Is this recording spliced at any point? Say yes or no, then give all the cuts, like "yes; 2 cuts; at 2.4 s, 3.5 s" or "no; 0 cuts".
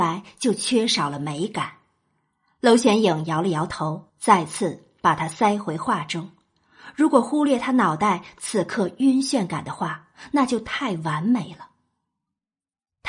yes; 1 cut; at 4.1 s